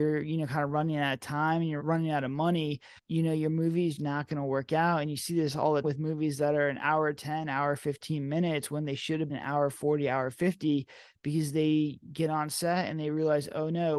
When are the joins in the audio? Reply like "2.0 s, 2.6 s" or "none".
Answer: 1.8 s, 3.0 s, 4.0 s, 5.8 s, 9.3 s